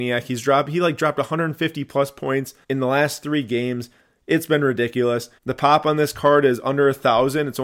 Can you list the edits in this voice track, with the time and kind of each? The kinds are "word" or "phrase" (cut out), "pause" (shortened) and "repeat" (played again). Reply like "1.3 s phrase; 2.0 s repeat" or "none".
2.6 s pause; 5.4 s pause